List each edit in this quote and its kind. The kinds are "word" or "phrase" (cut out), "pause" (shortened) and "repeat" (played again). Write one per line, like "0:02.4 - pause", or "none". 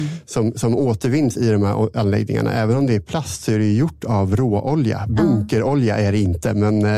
none

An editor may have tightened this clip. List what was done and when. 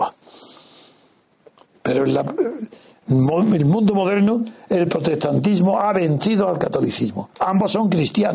none

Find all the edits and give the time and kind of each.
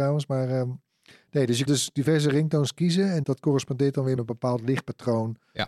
0:01.7 - word
0:03.2 - word
0:04.2 - word

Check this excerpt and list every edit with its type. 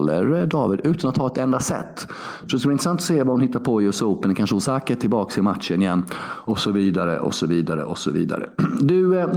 none

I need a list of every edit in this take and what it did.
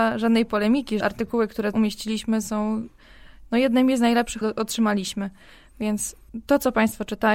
0:01.0 - word
0:01.7 - word
0:04.4 - word

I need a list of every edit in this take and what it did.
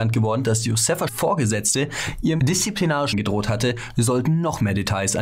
0:01.1 - word
0:02.4 - word
0:03.1 - word

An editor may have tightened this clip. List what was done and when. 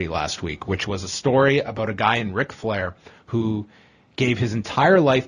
none

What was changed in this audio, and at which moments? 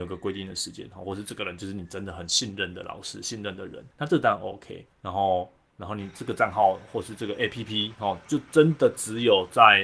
0:03.9 - pause
0:04.9 - pause

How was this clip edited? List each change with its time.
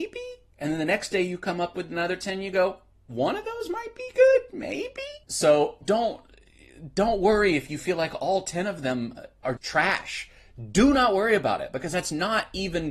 0:05.2 - pause
0:09.6 - word

